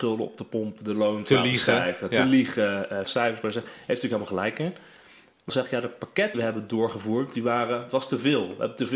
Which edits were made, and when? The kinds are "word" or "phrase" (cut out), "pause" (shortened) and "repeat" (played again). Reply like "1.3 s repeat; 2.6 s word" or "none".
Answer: 3.0 s word; 5.5 s word; 6.3 s word